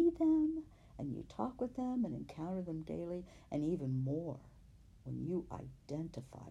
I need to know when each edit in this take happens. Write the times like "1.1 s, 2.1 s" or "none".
none